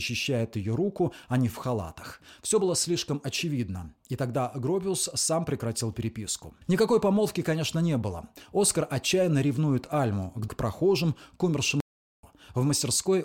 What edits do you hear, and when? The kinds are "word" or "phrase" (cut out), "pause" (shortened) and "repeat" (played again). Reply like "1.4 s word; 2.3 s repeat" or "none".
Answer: 1.5 s phrase; 6.6 s pause; 10.5 s word